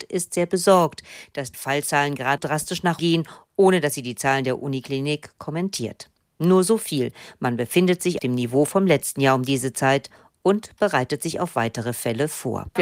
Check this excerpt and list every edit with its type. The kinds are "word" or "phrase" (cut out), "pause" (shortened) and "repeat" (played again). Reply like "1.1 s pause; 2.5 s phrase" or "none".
1.5 s word; 2.4 s word; 3.0 s word; 8.2 s word